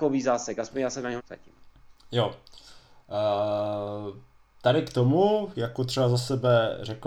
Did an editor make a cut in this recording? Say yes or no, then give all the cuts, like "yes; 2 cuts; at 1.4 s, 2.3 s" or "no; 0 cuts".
yes; 2 cuts; at 1.2 s, 5.5 s